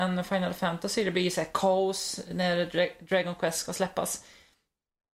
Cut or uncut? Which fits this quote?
uncut